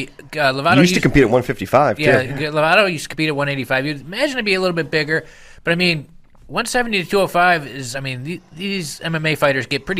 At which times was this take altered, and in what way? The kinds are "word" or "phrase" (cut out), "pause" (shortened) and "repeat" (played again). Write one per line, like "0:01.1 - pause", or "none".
none